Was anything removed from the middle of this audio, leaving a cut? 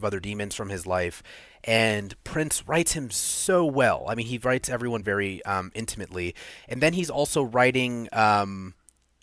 no; 0 cuts

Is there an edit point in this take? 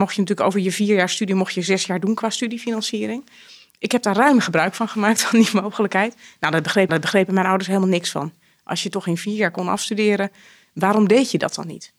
yes; 1 cut; at 6.9 s

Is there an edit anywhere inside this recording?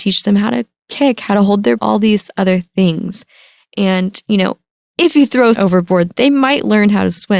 yes; 2 cuts; at 1.8 s, 5.5 s

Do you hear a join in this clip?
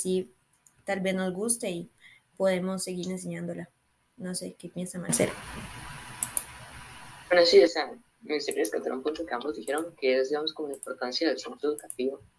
no; 0 cuts

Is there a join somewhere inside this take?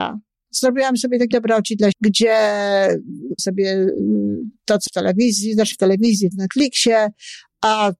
yes; 6 cuts; at 1.3 s, 1.9 s, 3.4 s, 4.9 s, 5.7 s, 6.3 s

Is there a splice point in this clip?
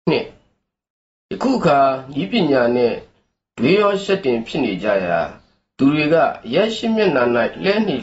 no; 0 cuts

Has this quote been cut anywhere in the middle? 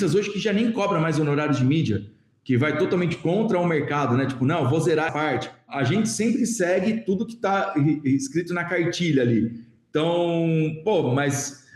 yes; 1 cut; at 5.1 s

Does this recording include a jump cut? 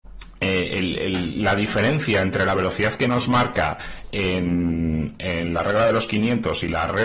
no; 0 cuts

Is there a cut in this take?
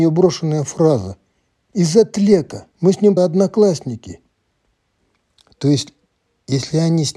yes; 2 cuts; at 2.7 s, 3.2 s

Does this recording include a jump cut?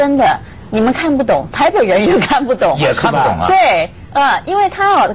no; 0 cuts

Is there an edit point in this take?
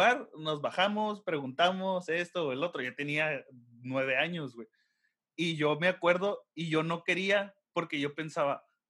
no; 0 cuts

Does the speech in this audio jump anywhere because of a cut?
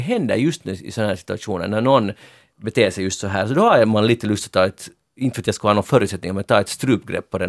no; 0 cuts

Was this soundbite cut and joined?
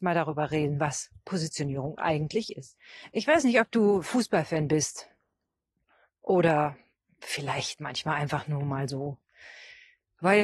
no; 0 cuts

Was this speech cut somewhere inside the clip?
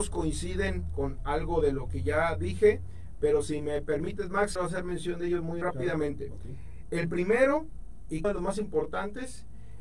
yes; 3 cuts; at 4.6 s, 5.6 s, 8.2 s

